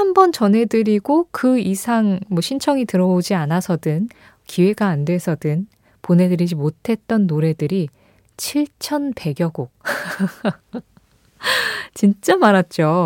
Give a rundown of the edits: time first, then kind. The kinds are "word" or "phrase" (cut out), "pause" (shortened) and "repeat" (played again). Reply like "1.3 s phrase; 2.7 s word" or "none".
none